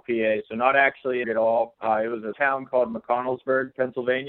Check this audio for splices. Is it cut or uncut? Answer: cut